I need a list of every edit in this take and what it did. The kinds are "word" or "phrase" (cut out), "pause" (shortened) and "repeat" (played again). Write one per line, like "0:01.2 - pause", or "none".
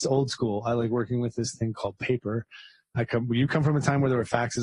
none